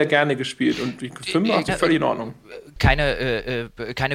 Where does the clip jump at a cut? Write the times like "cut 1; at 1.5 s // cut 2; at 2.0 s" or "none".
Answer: cut 1; at 1.7 s // cut 2; at 2.8 s